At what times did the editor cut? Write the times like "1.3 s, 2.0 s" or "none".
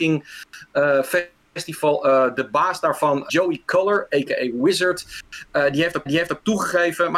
1.5 s, 3.3 s, 6.1 s